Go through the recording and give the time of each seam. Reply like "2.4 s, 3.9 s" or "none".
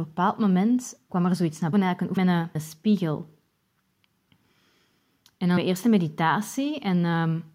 1.1 s, 1.7 s, 2.2 s, 2.6 s, 5.6 s